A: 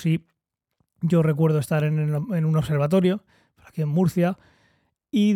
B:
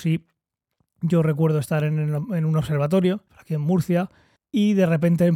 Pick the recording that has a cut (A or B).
B